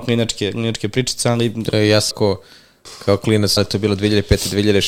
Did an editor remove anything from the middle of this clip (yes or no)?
yes